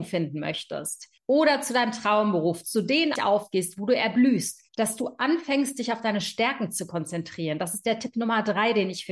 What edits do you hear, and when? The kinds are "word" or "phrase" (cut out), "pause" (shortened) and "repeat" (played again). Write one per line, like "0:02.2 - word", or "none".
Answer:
0:01.2 - pause
0:03.2 - phrase
0:04.7 - pause